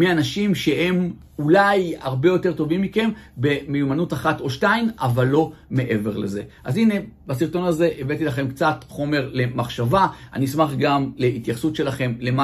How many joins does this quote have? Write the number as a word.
zero